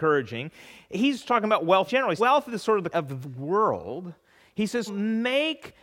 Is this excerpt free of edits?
no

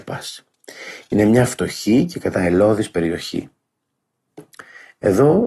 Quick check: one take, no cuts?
no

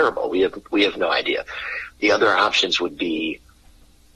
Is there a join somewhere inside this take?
no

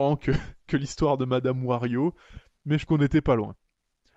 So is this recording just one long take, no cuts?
no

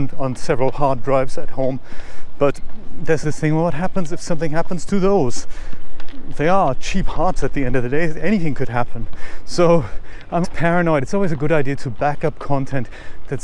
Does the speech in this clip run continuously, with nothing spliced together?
no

